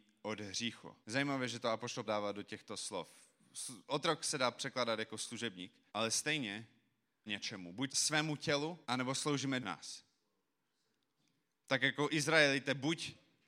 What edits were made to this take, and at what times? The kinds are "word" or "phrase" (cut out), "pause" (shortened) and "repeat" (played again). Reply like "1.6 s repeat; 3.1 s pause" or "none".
1.0 s pause; 2.0 s word; 5.9 s pause; 7.3 s word; 7.9 s word; 8.8 s pause; 9.6 s phrase